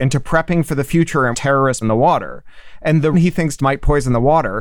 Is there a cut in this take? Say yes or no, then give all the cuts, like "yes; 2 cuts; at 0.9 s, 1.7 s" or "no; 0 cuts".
yes; 4 cuts; at 1.3 s, 1.8 s, 3.1 s, 3.6 s